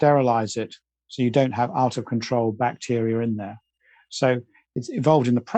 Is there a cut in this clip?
no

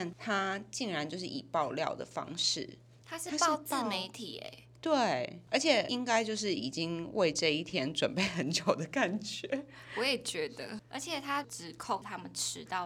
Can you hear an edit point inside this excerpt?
yes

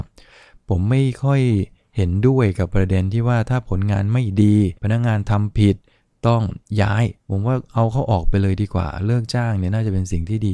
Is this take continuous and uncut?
no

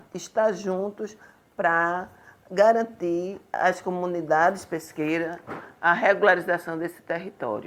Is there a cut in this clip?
no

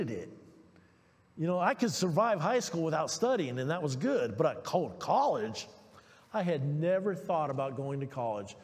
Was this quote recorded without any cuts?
yes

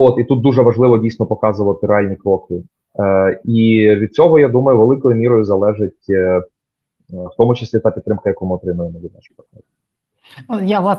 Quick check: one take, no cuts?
yes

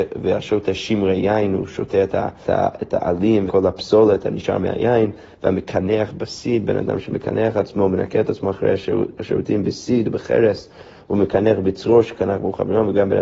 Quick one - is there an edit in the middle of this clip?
yes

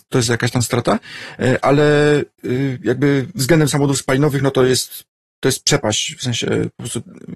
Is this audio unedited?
yes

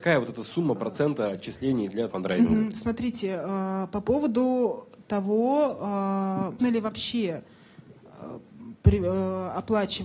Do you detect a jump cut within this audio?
yes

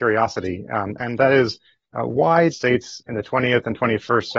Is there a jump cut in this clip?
yes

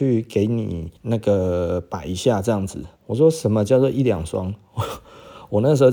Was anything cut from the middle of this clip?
yes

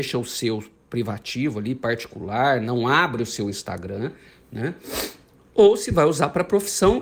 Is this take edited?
no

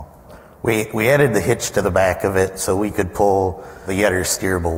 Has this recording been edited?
no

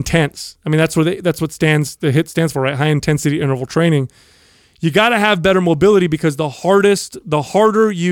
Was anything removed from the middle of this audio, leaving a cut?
no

